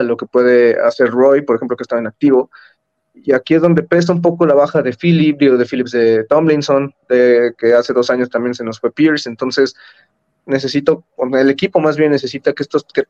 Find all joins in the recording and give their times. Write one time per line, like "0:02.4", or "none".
none